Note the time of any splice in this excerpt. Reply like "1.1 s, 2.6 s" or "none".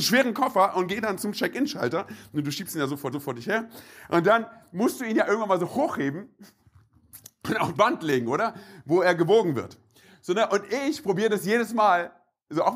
3.1 s, 7.7 s